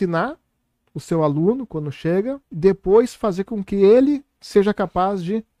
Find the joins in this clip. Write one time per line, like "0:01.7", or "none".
0:02.4